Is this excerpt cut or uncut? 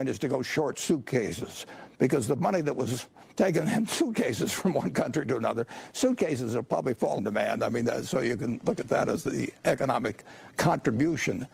cut